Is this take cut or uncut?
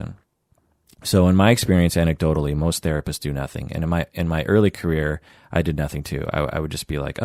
uncut